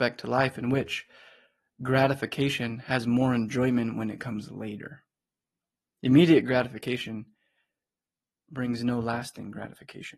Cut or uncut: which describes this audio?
uncut